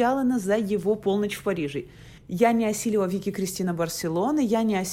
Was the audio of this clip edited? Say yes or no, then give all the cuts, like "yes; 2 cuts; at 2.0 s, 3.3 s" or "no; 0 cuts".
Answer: yes; 1 cut; at 2.2 s